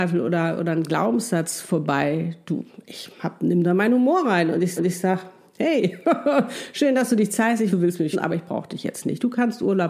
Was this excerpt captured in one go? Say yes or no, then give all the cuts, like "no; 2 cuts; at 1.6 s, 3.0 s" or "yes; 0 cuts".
no; 3 cuts; at 4.8 s, 7.7 s, 8.1 s